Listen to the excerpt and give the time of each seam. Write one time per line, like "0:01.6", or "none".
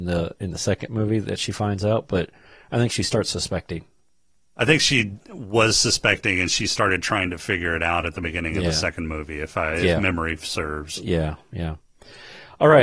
none